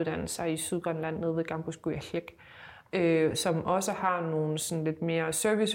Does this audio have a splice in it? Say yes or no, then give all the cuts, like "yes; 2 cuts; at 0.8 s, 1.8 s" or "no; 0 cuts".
no; 0 cuts